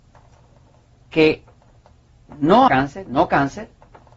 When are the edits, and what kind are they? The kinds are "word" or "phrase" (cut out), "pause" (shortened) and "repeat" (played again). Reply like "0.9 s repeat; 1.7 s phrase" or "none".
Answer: 2.7 s word